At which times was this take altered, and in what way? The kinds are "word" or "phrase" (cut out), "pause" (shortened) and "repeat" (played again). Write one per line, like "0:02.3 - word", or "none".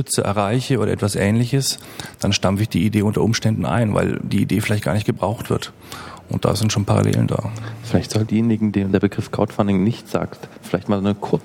0:08.3 - phrase